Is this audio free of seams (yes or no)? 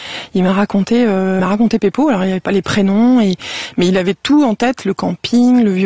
no